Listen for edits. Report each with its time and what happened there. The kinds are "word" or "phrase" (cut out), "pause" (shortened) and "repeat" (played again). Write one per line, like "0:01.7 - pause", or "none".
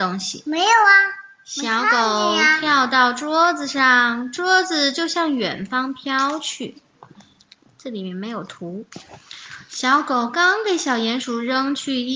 none